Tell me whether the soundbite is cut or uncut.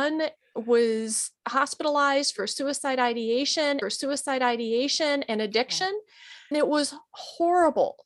cut